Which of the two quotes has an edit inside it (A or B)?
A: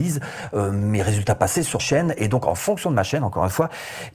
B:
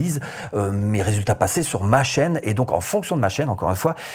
A